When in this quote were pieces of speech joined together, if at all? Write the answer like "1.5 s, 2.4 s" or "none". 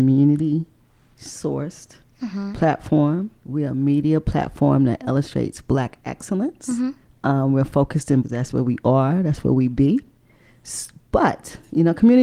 3.4 s, 7.0 s, 8.2 s